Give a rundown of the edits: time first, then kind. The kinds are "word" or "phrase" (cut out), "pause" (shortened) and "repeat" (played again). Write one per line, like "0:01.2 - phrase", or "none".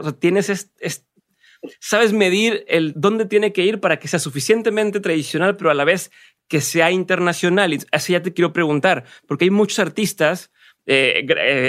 none